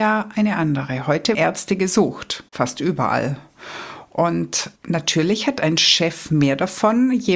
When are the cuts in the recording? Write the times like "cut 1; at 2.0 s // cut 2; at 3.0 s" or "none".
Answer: cut 1; at 1.3 s // cut 2; at 2.5 s // cut 3; at 4.8 s